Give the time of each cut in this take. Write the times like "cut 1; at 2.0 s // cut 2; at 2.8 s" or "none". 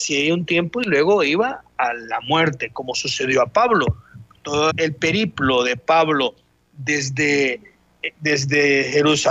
cut 1; at 4.7 s